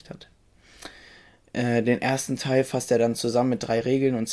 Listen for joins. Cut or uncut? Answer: uncut